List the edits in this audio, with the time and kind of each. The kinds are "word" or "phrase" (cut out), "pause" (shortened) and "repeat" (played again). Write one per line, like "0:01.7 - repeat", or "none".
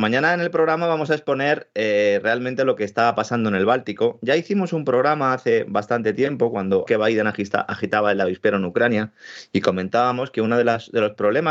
0:06.9 - word